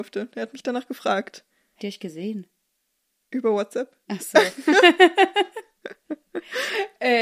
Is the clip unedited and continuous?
no; 1 cut; at 1.8 s

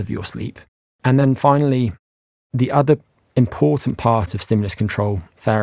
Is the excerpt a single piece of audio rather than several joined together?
yes; 0 cuts

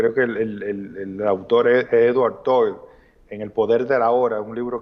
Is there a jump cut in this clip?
no; 0 cuts

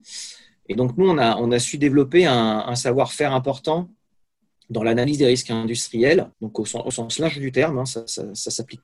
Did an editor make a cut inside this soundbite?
yes; 1 cut; at 6.3 s

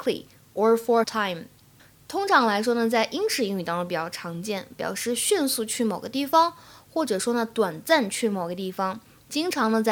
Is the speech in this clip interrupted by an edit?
yes; 1 cut; at 1.0 s

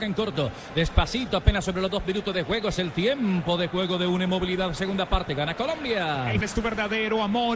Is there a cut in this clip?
yes; 2 cuts; at 2.0 s, 6.4 s

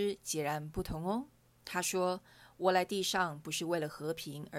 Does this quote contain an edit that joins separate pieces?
yes; 1 cut; at 1.4 s

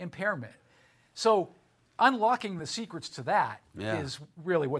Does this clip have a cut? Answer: no; 0 cuts

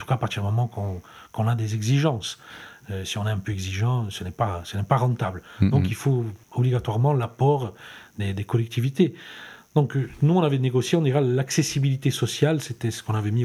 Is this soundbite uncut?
no; 1 cut; at 6.4 s

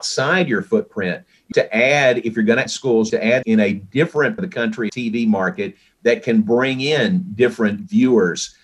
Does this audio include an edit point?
yes; 6 cuts; at 1.5 s, 2.7 s, 3.1 s, 3.4 s, 4.4 s, 4.9 s

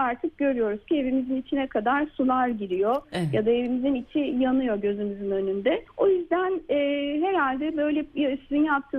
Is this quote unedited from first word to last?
no; 1 cut; at 5.9 s

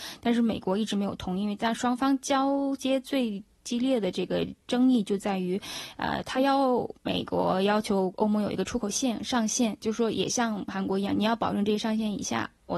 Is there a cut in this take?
yes; 1 cut; at 7.0 s

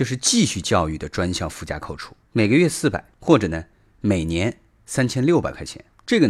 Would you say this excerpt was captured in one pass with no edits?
yes; 0 cuts

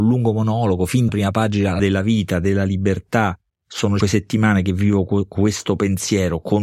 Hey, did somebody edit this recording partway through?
yes; 3 cuts; at 1.1 s, 1.8 s, 4.0 s

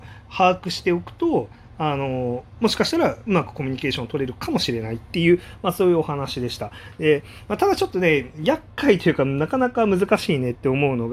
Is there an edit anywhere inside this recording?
no; 0 cuts

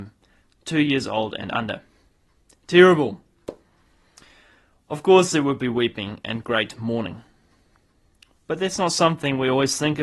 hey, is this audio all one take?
yes; 0 cuts

